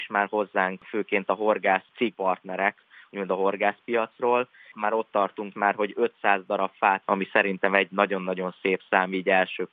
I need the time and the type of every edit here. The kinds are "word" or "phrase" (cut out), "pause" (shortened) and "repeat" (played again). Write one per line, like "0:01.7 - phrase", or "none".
0:02.1 - word
0:04.7 - word
0:05.5 - word
0:07.0 - word